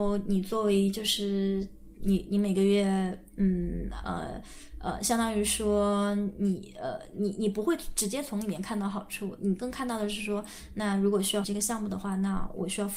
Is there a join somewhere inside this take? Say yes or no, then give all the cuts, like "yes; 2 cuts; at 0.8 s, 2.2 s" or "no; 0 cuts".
yes; 1 cut; at 11.4 s